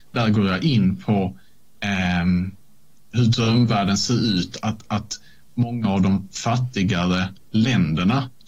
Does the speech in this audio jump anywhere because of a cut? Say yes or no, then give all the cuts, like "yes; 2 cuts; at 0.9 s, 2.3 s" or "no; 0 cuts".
no; 0 cuts